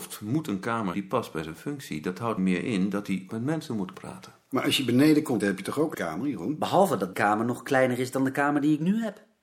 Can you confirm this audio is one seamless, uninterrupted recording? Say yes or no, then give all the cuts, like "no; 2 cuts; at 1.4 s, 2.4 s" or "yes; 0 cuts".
no; 7 cuts; at 0.9 s, 2.4 s, 3.3 s, 3.9 s, 5.4 s, 5.9 s, 7.1 s